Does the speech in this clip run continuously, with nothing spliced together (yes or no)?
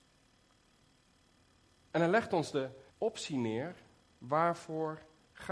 no